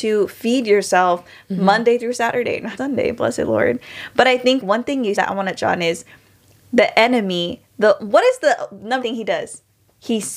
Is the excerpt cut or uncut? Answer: cut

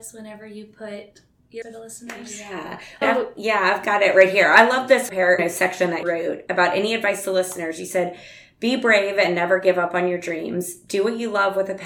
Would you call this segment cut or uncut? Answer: cut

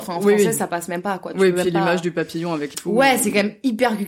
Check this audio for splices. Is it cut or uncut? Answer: cut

